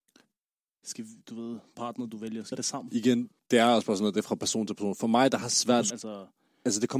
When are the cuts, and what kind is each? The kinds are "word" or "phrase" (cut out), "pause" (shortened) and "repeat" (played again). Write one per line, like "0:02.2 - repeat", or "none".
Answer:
0:01.2 - pause
0:01.7 - word
0:02.5 - phrase
0:03.4 - word
0:05.4 - phrase
0:05.9 - phrase